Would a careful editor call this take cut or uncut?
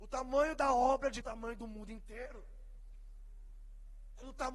cut